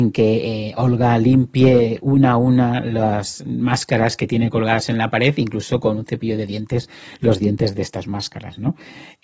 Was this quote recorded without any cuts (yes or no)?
yes